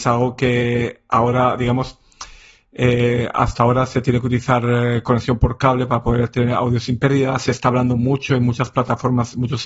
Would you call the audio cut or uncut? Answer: uncut